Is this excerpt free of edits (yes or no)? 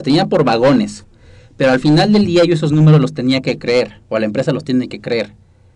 yes